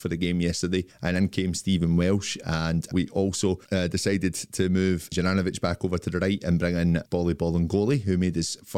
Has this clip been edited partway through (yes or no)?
yes